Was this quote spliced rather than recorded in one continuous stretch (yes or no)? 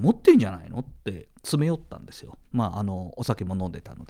yes